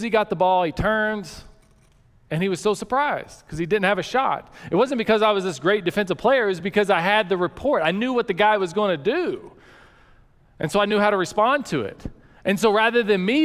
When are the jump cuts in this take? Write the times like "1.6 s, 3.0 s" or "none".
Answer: none